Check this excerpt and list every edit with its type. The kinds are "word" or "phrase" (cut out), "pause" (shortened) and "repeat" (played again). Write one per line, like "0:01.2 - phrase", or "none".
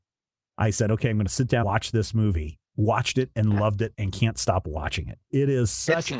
0:01.6 - word
0:02.7 - pause